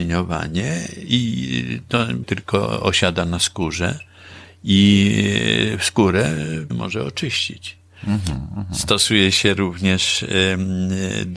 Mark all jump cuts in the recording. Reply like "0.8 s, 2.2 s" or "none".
2.2 s, 6.7 s